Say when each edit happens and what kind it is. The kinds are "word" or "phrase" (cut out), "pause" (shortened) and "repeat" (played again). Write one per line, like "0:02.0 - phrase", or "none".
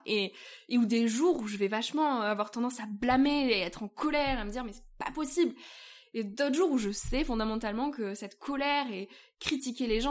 none